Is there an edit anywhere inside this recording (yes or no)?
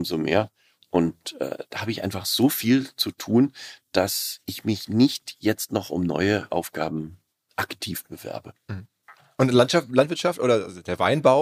no